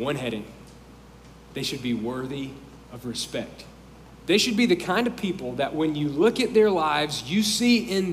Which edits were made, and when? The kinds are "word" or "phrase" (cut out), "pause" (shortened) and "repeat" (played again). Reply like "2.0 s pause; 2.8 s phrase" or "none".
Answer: 4.2 s pause